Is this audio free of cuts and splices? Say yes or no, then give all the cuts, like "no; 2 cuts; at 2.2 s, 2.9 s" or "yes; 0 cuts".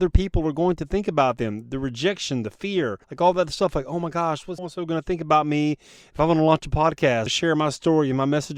no; 3 cuts; at 3.0 s, 4.6 s, 7.3 s